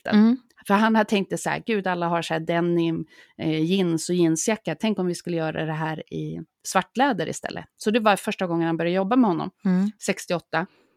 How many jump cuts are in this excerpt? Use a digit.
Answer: 0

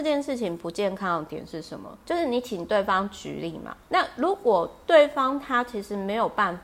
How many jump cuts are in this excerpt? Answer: 2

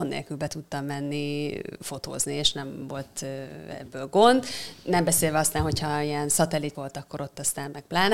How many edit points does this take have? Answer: 1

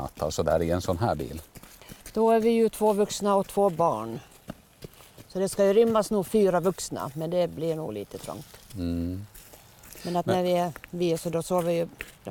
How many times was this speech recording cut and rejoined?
1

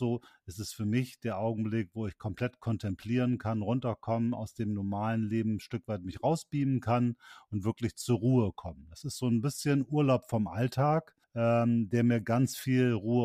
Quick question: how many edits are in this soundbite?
1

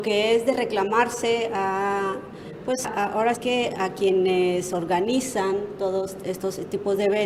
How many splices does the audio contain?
2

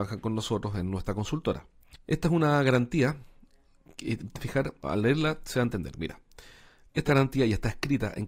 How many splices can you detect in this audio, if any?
3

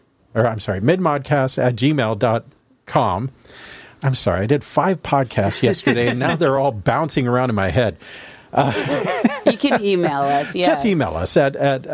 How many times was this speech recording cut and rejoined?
0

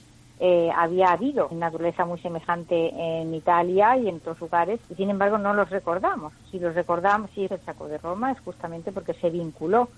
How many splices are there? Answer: 5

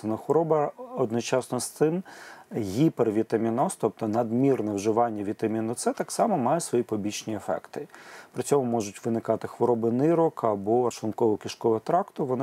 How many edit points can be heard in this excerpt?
1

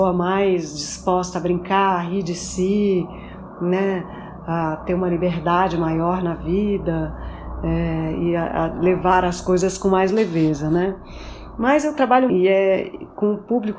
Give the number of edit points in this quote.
1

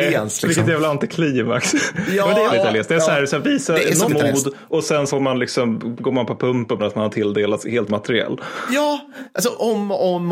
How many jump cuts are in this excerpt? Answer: 5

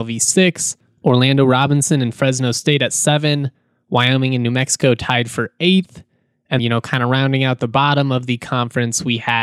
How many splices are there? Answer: 1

